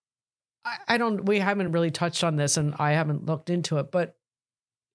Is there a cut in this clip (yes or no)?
no